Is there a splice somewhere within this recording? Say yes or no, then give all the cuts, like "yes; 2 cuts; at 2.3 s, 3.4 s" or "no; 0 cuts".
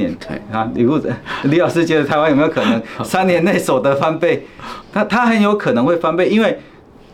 yes; 1 cut; at 4.8 s